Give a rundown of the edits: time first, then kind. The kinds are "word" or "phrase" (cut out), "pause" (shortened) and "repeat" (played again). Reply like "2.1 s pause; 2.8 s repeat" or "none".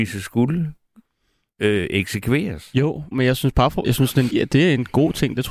3.1 s word; 3.8 s word; 4.3 s word